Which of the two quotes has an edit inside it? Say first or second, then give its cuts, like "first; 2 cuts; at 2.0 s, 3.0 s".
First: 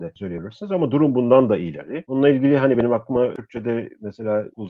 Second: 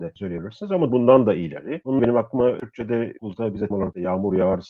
second; 4 cuts; at 0.9 s, 2.0 s, 3.2 s, 3.7 s